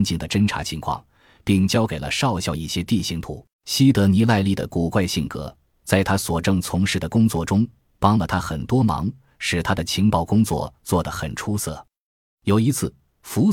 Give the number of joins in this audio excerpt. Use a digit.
1